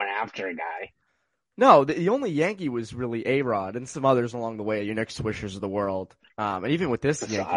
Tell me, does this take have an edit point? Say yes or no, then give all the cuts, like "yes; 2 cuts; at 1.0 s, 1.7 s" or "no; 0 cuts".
no; 0 cuts